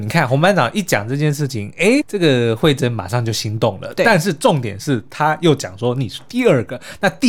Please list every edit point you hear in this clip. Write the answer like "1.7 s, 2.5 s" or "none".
2.0 s